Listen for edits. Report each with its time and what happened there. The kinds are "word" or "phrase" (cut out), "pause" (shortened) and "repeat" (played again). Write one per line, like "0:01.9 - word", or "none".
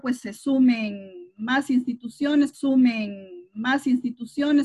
0:02.5 - repeat